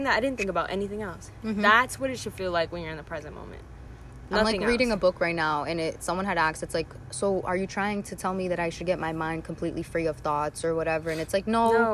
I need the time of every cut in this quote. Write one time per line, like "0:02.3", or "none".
none